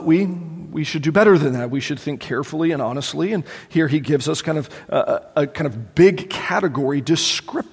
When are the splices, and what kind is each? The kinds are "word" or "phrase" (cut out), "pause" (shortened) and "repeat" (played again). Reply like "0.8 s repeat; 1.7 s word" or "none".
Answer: none

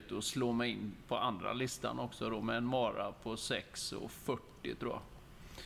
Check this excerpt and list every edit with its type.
none

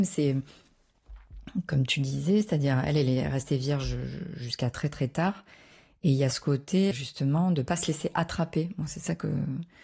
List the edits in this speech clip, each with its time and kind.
6.9 s word

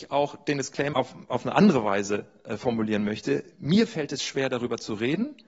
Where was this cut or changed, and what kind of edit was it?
0.9 s word

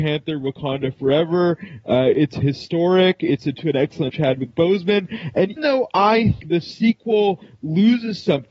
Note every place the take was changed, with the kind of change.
3.5 s word; 4.1 s word; 5.6 s word; 6.4 s word

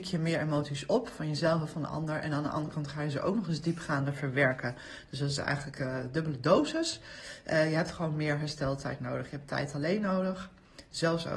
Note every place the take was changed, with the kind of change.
none

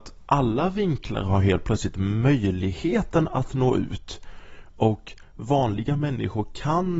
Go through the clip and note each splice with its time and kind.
none

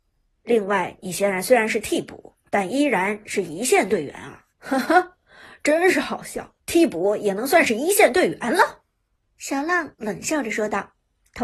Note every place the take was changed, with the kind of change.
2.5 s pause; 4.5 s pause; 6.6 s pause; 9.2 s pause

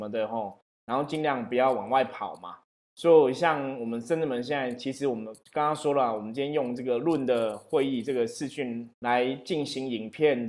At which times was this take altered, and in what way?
5.4 s pause; 8.9 s pause

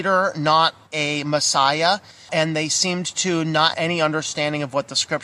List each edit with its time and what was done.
2.3 s word; 3.7 s word

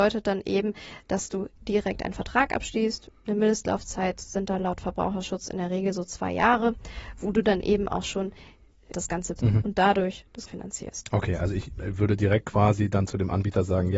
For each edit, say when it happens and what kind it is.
8.9 s word; 9.4 s word; 10.5 s word

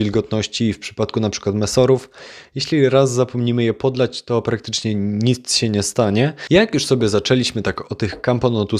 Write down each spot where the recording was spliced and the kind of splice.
none

